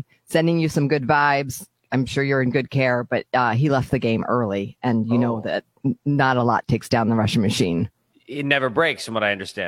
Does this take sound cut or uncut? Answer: uncut